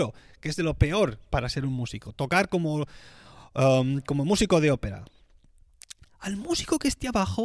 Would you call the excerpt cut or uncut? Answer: uncut